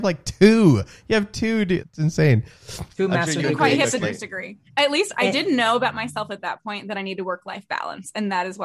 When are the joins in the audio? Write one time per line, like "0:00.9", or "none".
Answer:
0:01.8
0:04.0
0:04.7